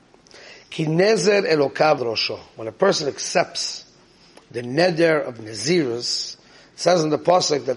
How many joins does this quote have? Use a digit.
1